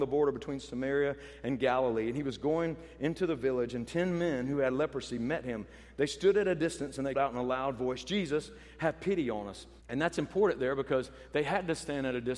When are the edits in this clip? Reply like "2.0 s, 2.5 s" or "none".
7.1 s, 9.8 s